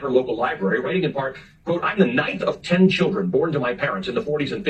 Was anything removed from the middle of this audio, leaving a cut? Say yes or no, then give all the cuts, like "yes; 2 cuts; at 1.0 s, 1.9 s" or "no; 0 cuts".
no; 0 cuts